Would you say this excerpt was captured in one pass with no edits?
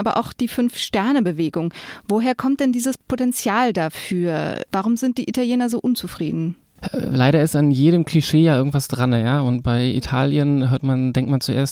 yes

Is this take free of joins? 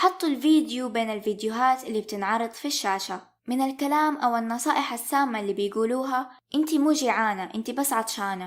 yes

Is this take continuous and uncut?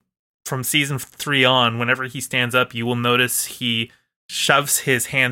yes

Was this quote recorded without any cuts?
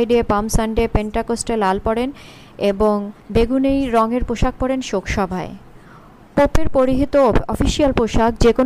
no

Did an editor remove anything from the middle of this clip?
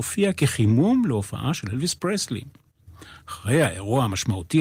no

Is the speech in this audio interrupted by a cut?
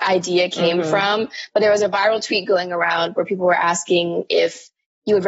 no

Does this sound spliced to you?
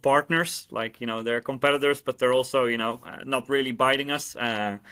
no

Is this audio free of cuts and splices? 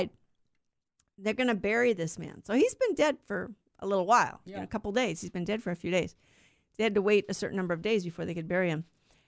yes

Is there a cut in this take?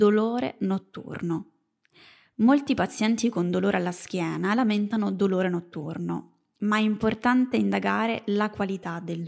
no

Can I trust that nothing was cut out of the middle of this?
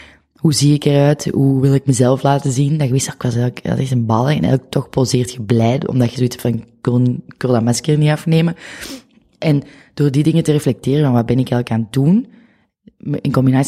yes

